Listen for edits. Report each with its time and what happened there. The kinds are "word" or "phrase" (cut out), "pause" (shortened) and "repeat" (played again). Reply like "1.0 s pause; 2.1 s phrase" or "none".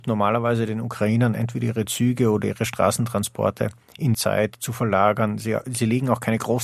4.1 s word